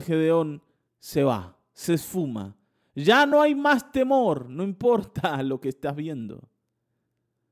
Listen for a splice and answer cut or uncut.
uncut